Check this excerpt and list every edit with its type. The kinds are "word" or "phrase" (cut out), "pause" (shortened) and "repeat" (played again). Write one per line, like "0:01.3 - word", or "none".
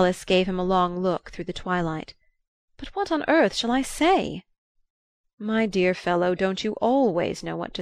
none